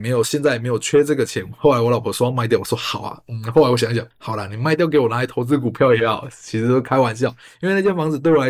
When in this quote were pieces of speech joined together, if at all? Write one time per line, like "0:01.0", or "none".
0:04.1